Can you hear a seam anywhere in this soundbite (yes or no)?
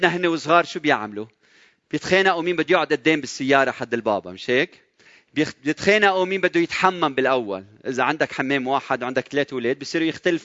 no